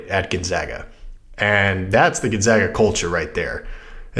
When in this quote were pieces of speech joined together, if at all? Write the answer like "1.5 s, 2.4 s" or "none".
none